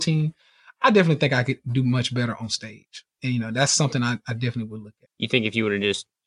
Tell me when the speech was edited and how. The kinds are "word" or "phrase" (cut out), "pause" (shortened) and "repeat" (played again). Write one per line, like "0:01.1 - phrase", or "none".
0:05.1 - pause

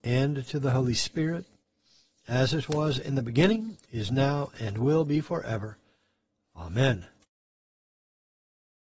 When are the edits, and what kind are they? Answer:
none

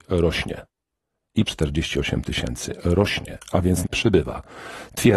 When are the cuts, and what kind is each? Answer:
0:01.4 - word
0:03.8 - word

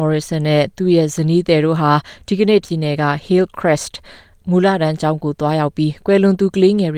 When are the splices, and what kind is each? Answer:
0:02.6 - word

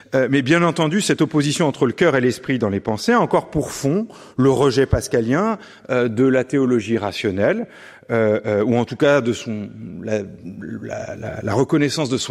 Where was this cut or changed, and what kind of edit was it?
none

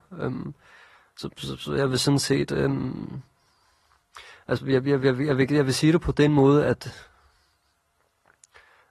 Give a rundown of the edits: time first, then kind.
none

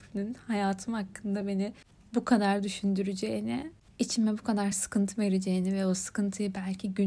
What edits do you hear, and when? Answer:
none

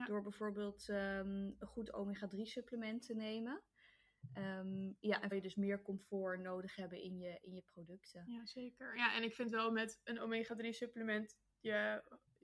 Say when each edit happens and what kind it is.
0:05.3 - phrase

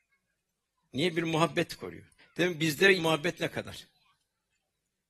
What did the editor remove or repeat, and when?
0:02.2 - pause
0:03.0 - phrase

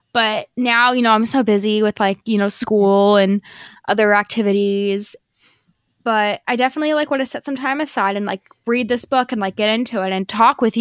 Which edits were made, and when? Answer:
none

